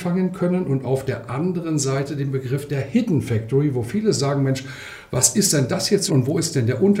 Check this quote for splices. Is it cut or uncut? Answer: cut